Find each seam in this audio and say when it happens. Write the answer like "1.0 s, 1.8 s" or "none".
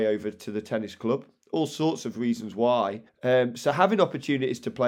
3.1 s